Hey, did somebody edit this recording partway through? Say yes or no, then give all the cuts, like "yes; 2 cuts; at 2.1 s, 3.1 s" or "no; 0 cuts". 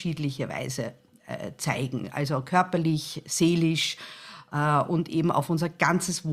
no; 0 cuts